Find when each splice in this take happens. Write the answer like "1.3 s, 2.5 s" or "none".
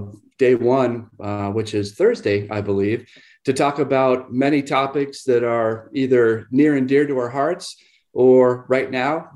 none